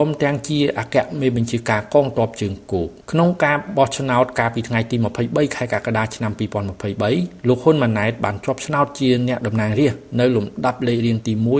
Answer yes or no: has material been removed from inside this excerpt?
yes